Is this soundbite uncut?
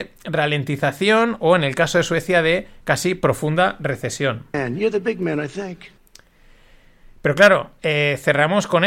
yes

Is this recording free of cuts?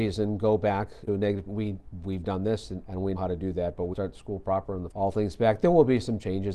no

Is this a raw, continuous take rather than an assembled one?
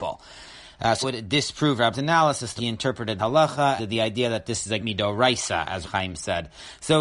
no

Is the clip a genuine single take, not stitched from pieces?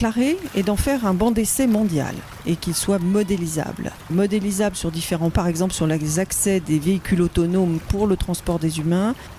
no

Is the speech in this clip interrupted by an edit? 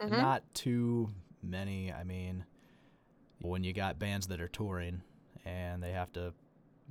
yes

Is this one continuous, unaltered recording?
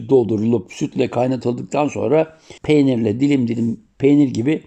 no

